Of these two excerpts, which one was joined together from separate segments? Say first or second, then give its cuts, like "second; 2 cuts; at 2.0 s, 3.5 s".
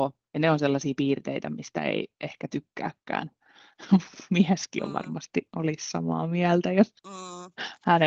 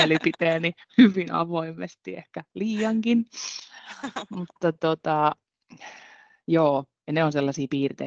first; 1 cut; at 7.0 s